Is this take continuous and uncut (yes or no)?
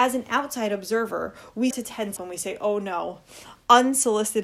no